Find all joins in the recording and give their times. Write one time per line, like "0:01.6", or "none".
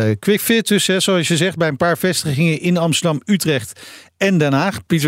none